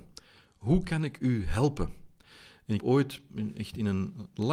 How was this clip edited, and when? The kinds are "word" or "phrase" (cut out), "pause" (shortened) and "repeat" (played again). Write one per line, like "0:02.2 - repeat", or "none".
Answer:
0:02.8 - word